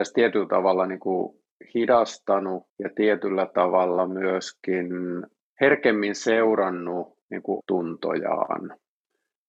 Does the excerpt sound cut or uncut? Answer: cut